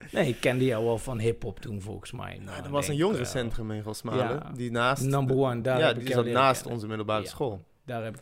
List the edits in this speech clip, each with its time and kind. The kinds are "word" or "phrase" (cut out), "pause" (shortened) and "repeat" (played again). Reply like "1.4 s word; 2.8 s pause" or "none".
none